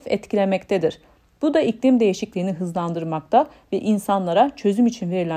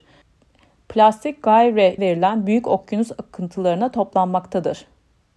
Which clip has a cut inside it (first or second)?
second